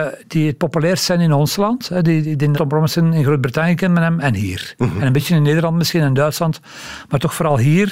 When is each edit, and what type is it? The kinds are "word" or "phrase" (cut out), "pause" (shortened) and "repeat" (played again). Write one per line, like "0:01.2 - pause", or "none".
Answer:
0:02.5 - word